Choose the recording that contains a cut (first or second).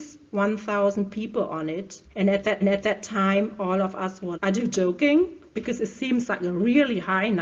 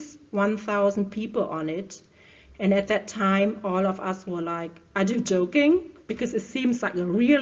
first